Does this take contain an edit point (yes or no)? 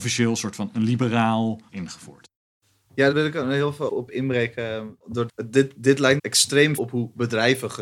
yes